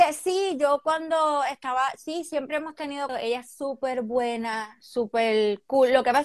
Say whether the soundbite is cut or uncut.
cut